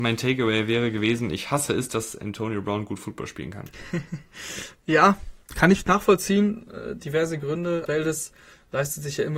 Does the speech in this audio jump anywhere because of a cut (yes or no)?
yes